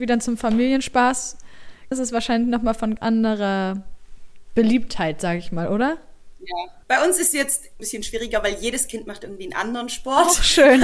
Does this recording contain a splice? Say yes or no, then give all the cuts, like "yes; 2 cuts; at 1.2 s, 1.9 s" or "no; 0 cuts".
yes; 4 cuts; at 1.9 s, 3.0 s, 6.8 s, 7.8 s